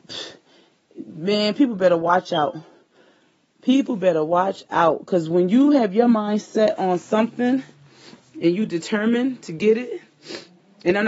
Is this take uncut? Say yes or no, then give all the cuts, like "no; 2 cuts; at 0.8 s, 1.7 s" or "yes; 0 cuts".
yes; 0 cuts